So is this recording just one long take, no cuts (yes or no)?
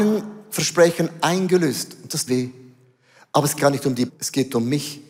no